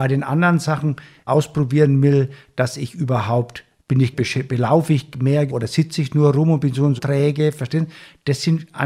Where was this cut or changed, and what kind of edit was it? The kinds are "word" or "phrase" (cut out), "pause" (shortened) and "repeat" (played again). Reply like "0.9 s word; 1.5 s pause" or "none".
1.3 s phrase; 4.1 s phrase; 5.5 s word; 7.0 s word